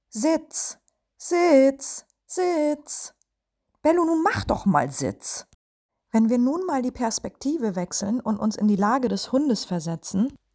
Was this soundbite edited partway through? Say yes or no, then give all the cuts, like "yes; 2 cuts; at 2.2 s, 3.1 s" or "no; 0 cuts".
no; 0 cuts